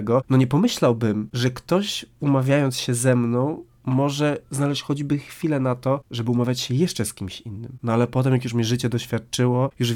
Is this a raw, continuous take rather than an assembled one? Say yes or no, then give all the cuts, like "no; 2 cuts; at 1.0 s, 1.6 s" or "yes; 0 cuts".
yes; 0 cuts